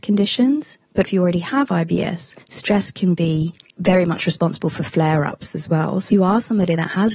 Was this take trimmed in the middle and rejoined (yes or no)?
yes